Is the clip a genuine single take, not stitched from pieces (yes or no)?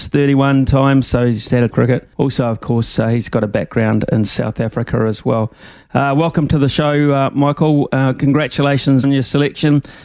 no